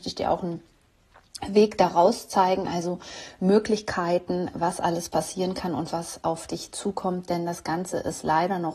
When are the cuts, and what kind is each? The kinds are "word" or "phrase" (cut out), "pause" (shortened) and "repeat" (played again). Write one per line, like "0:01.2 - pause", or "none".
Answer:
none